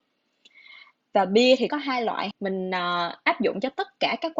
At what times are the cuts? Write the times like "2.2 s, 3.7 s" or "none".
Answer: 1.7 s, 2.3 s

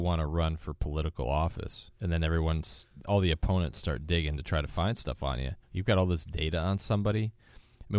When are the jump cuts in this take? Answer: 2.0 s, 5.6 s

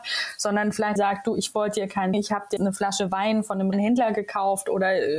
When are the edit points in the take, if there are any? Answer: 1.0 s, 2.1 s, 2.6 s, 3.7 s

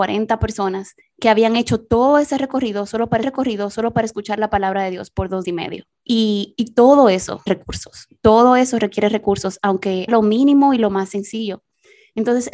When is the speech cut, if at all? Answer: 1.0 s, 3.2 s, 5.4 s, 6.0 s, 7.5 s, 10.1 s

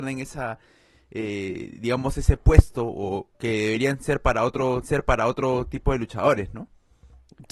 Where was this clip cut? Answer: 3.3 s, 4.8 s

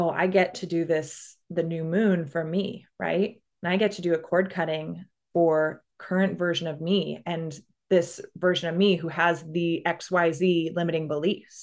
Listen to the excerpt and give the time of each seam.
3.5 s

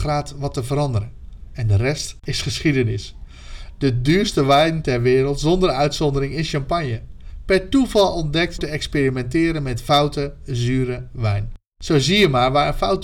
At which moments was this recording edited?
8.6 s

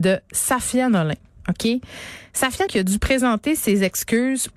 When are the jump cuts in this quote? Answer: 2.7 s

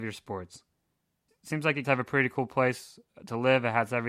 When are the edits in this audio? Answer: 1.3 s, 1.8 s

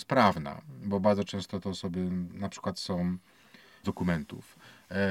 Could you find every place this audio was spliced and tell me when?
3.8 s

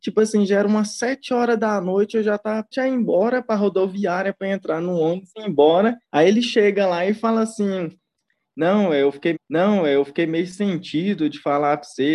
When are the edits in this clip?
2.7 s, 6.0 s, 9.3 s

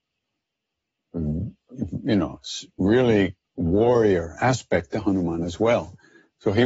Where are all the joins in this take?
3.4 s

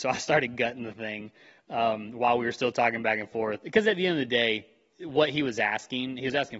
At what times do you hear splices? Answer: none

